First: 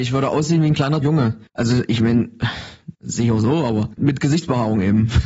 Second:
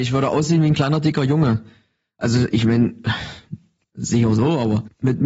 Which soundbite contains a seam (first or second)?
first